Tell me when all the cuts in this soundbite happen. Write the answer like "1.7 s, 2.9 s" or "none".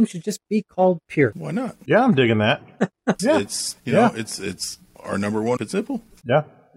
3.2 s, 3.8 s, 5.0 s, 5.6 s